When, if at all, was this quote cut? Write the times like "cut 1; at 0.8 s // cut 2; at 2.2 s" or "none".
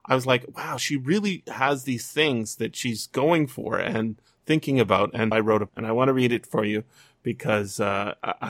cut 1; at 5.3 s // cut 2; at 5.7 s